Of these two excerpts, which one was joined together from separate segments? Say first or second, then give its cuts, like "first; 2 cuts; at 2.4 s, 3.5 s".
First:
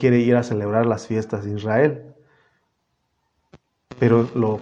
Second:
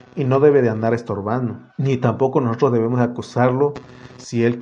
second; 1 cut; at 1.7 s